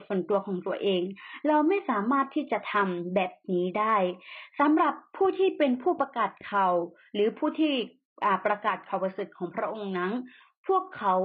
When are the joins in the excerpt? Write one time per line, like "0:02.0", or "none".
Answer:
none